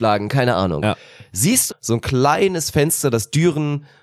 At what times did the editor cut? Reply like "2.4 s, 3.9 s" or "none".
1.7 s